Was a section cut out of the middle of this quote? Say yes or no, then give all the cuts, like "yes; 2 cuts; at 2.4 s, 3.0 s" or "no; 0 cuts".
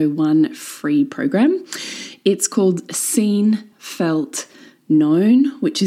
no; 0 cuts